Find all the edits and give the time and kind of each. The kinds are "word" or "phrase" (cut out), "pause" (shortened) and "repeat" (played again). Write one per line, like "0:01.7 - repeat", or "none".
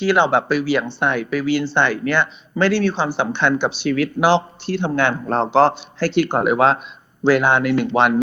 none